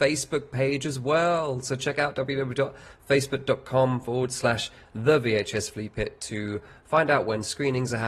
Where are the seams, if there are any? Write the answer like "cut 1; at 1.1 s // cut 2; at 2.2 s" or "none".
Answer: none